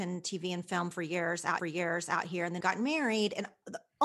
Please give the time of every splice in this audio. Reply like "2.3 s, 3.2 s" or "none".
1.6 s, 2.6 s